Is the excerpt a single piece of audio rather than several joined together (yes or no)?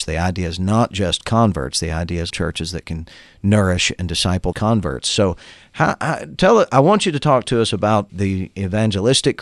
no